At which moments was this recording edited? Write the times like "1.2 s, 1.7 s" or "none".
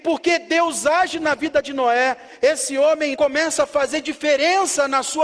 3.1 s

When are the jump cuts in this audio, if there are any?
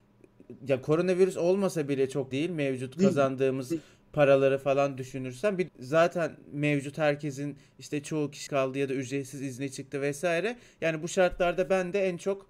2.3 s, 5.7 s, 8.5 s

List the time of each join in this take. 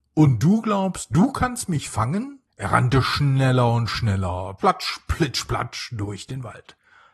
2.5 s, 4.6 s

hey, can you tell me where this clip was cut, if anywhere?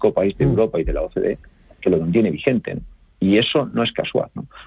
none

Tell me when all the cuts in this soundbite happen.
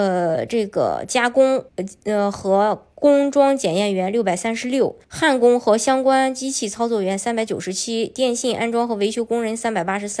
1.7 s, 5.0 s

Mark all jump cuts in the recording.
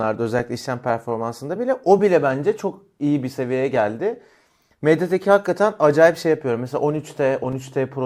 none

